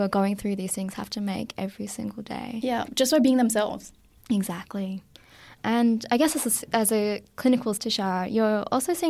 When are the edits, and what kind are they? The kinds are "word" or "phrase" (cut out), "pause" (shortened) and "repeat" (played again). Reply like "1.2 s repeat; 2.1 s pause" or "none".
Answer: 7.8 s word